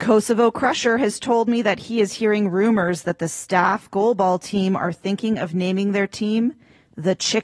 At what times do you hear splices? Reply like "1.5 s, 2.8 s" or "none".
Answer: none